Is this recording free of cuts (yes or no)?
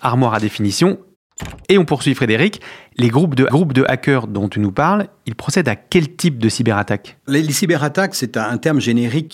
no